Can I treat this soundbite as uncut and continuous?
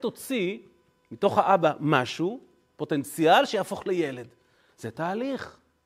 yes; 0 cuts

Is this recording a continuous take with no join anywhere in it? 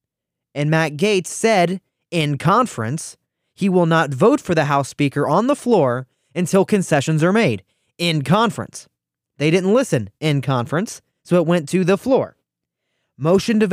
yes; 0 cuts

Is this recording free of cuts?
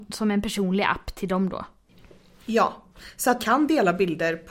no; 1 cut; at 3.4 s

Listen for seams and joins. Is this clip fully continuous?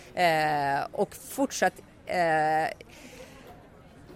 no; 1 cut; at 1.2 s

